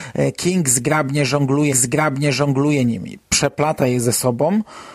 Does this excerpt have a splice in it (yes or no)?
yes